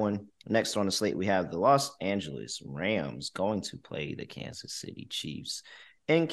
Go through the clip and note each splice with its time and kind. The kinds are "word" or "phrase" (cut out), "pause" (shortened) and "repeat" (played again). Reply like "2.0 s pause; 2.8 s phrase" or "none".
none

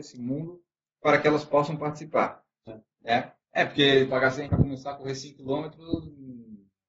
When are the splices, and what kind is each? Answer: 2.7 s phrase; 3.4 s pause; 4.1 s word; 4.4 s word

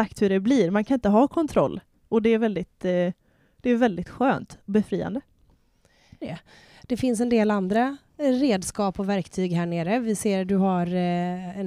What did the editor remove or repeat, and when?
6.2 s phrase

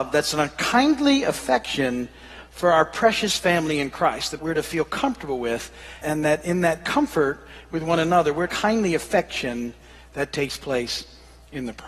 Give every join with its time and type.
4.4 s phrase; 6.0 s word; 8.5 s phrase

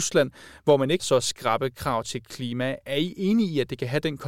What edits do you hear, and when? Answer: 1.0 s word

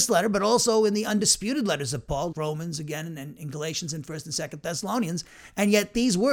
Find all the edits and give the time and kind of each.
2.3 s word

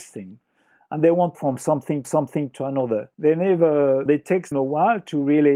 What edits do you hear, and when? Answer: 1.3 s phrase; 2.0 s repeat; 3.1 s pause; 4.1 s phrase; 4.5 s word

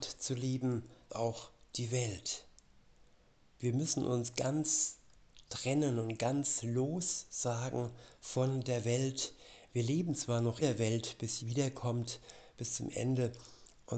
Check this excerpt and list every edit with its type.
1.1 s word; 10.6 s word; 11.4 s word

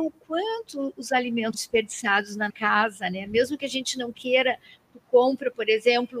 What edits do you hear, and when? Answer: 1.5 s word; 2.5 s word

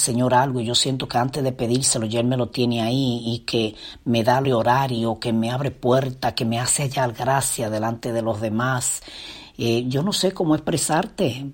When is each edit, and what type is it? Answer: 4.4 s word

